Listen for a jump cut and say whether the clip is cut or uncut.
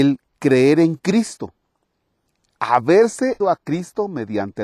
cut